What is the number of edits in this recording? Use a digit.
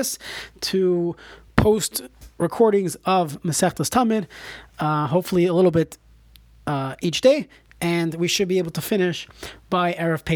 0